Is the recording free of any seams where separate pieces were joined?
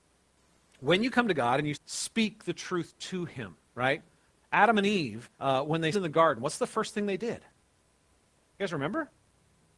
no; 4 cuts; at 1.7 s, 3.6 s, 5.3 s, 5.9 s

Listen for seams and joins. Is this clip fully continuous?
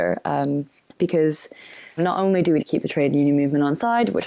no; 2 cuts; at 2.0 s, 2.6 s

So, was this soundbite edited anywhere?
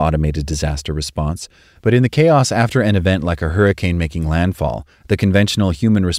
no; 0 cuts

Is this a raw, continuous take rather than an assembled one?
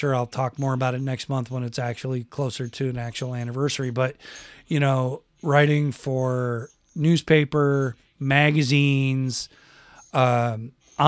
yes; 0 cuts

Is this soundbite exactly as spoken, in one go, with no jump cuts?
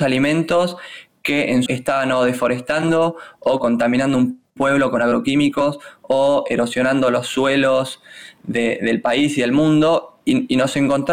no; 2 cuts; at 1.7 s, 4.5 s

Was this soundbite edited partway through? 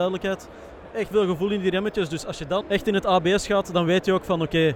yes; 2 cuts; at 1.1 s, 2.6 s

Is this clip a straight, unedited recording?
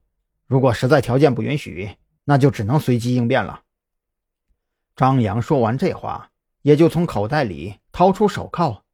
yes; 0 cuts

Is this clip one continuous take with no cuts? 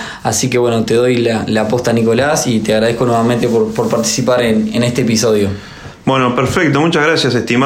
yes; 0 cuts

